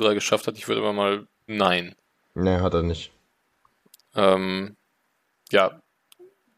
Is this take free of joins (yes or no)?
no